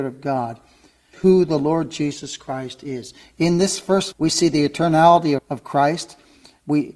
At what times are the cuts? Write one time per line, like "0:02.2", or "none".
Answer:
0:01.1
0:04.1
0:05.4

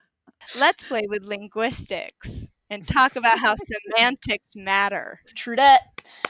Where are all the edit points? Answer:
0:05.2

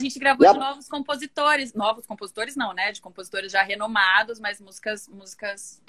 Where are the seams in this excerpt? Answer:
none

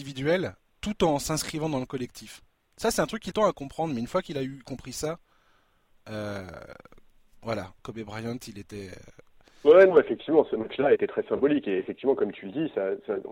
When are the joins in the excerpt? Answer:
0:03.3
0:07.8
0:11.0

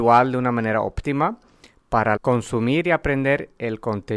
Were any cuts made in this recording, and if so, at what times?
0:02.2

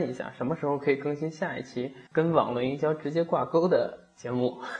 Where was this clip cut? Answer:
0:02.1

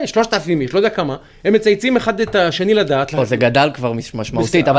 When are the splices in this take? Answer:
none

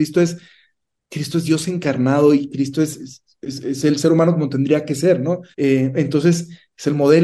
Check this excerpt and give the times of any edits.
0:05.5

